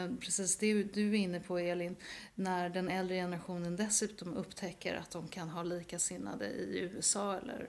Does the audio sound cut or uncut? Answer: uncut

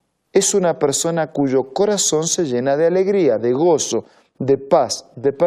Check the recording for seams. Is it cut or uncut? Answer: uncut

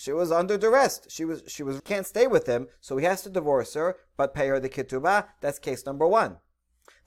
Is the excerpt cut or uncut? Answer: cut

